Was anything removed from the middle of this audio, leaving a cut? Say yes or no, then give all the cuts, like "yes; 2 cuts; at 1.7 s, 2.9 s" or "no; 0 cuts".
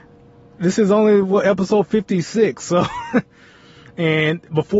no; 0 cuts